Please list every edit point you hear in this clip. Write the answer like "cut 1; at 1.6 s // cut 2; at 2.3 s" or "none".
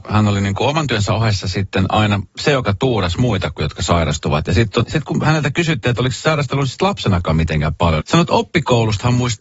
cut 1; at 4.8 s // cut 2; at 8.0 s